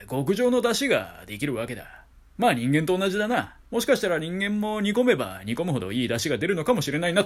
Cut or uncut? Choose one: cut